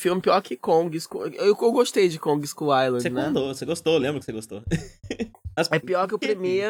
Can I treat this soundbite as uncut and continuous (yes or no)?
yes